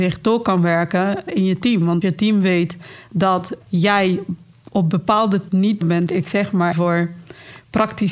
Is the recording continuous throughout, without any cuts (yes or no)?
no